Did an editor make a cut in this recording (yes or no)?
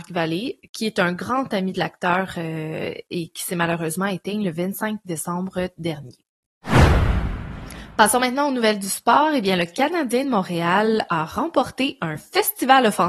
no